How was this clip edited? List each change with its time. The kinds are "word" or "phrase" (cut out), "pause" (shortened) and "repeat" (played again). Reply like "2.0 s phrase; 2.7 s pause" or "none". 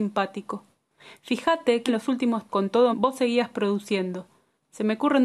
1.9 s word; 2.5 s word; 2.9 s word